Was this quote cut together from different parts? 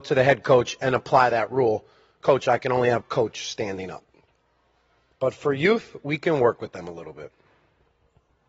yes; 1 cut; at 3.0 s

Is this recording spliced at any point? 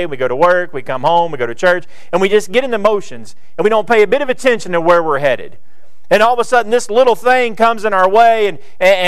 no; 0 cuts

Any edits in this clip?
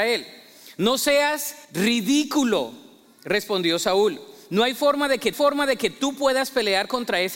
yes; 2 cuts; at 1.6 s, 5.3 s

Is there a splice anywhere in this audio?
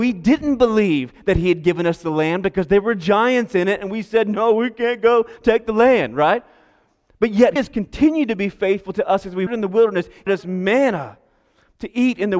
yes; 3 cuts; at 7.6 s, 9.5 s, 10.3 s

